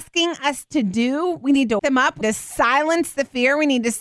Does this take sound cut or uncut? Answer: cut